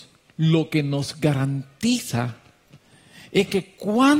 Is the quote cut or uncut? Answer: uncut